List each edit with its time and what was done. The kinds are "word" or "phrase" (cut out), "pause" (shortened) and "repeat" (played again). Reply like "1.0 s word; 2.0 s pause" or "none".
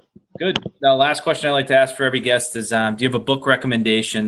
none